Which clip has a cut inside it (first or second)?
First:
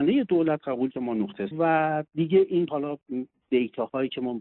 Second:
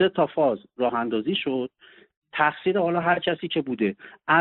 first